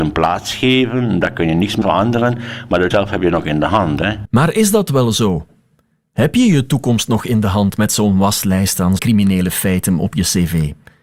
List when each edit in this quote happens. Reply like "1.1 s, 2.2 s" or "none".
1.8 s, 2.9 s, 9.0 s